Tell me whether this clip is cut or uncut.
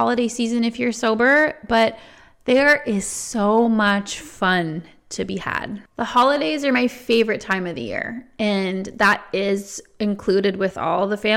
uncut